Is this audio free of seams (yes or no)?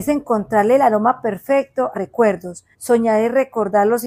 no